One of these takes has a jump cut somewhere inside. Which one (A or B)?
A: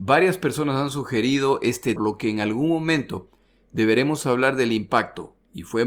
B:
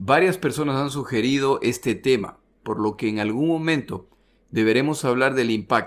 A